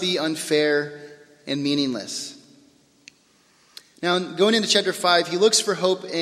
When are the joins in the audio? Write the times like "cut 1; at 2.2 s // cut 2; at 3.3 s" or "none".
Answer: none